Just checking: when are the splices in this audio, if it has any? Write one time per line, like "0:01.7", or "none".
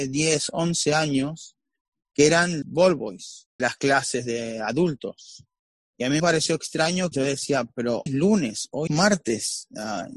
0:02.6
0:03.6
0:06.2
0:07.1
0:08.1
0:08.9